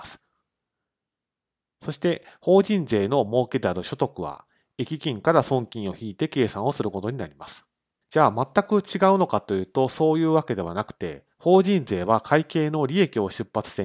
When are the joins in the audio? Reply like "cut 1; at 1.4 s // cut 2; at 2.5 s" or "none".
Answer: cut 1; at 11.3 s

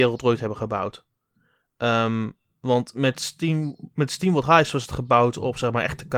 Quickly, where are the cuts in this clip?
none

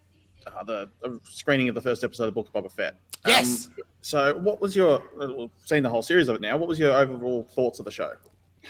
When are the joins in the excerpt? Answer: cut 1; at 3.9 s

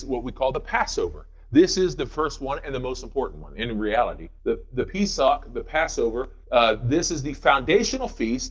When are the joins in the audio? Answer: cut 1; at 4.4 s // cut 2; at 6.4 s

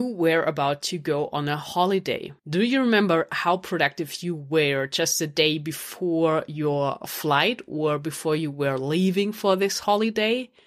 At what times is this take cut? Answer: cut 1; at 2.4 s

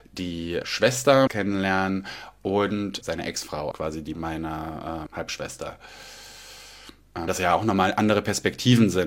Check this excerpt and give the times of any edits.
cut 1; at 1.3 s // cut 2; at 3.0 s // cut 3; at 3.7 s // cut 4; at 4.1 s // cut 5; at 5.1 s // cut 6; at 7.3 s

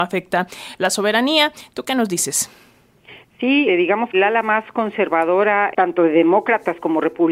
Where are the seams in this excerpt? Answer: cut 1; at 3.7 s // cut 2; at 4.1 s // cut 3; at 5.7 s

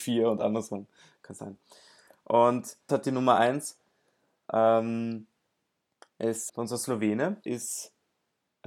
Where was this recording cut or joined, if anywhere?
cut 1; at 1.4 s // cut 2; at 2.9 s // cut 3; at 6.5 s // cut 4; at 7.5 s

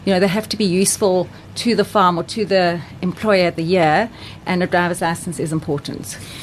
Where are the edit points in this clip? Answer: cut 1; at 3.5 s

